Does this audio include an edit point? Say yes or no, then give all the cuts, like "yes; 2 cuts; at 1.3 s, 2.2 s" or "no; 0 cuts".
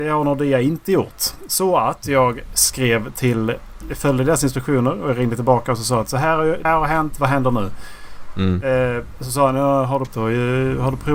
yes; 2 cuts; at 6.6 s, 10.1 s